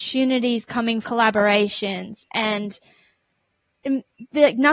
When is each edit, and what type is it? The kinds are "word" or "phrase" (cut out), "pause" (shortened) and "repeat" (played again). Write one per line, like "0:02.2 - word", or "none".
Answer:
0:01.0 - phrase